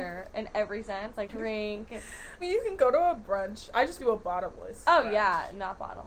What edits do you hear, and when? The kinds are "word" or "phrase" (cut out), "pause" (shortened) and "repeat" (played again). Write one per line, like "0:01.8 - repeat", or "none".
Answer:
0:01.3 - word
0:02.4 - word
0:04.0 - word